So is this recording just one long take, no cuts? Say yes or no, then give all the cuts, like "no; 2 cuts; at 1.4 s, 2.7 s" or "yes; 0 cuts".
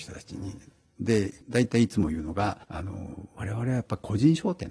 no; 2 cuts; at 1.4 s, 2.6 s